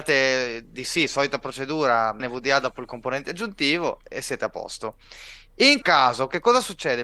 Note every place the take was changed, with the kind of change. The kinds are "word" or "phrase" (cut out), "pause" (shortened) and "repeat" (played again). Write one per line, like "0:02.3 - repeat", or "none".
0:02.2 - word
0:04.1 - word
0:05.8 - word